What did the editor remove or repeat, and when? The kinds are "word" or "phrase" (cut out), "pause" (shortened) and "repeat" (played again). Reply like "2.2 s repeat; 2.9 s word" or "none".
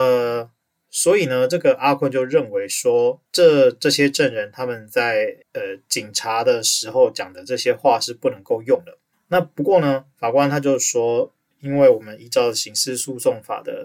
3.3 s word; 5.4 s pause; 9.1 s pause; 11.5 s word